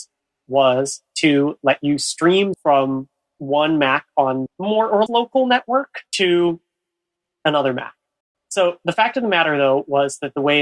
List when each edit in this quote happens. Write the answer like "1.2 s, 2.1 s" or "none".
2.5 s, 4.5 s, 5.1 s, 6.1 s, 8.2 s